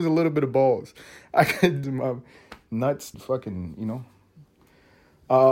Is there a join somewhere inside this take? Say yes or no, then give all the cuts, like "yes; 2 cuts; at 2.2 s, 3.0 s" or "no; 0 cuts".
yes; 2 cuts; at 1.8 s, 3.1 s